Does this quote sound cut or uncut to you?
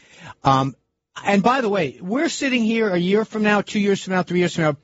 uncut